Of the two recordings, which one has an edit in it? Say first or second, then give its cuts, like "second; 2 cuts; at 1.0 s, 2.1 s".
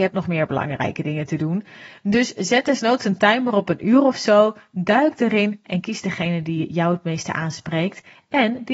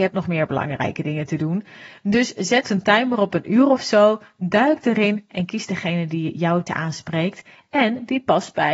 second; 2 cuts; at 2.6 s, 6.7 s